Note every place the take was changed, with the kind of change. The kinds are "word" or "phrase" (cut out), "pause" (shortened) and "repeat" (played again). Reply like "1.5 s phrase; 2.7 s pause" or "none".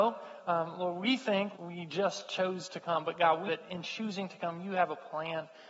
1.5 s word; 3.5 s word